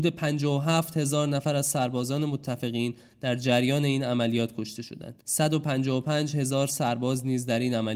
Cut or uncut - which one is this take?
cut